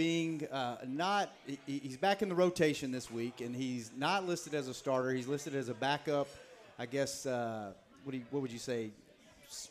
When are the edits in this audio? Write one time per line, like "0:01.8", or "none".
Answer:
none